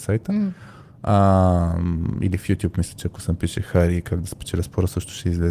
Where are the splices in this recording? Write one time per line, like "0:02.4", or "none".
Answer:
none